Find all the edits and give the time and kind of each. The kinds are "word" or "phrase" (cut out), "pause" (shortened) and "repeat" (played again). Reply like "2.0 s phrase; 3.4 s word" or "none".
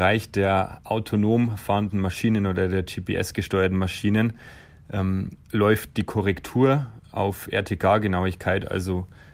5.4 s pause